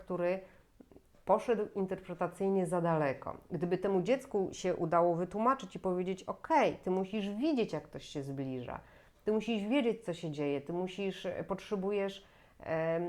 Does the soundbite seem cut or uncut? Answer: uncut